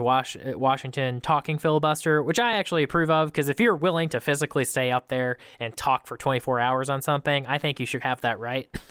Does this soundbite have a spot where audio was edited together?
no; 0 cuts

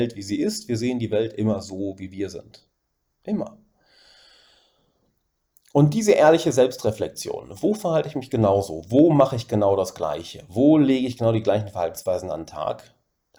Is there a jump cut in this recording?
no; 0 cuts

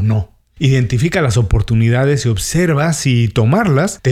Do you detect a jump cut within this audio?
no; 0 cuts

